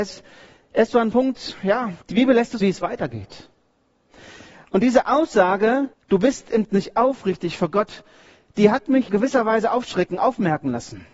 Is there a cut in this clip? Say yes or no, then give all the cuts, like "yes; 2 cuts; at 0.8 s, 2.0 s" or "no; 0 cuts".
yes; 6 cuts; at 1.1 s, 2.0 s, 2.6 s, 5.9 s, 6.7 s, 9.1 s